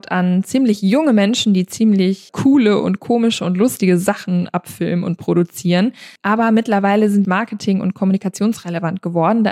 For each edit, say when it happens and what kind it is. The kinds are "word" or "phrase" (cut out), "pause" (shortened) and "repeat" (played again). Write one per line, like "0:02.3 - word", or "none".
0:02.3 - word
0:06.2 - pause
0:07.2 - phrase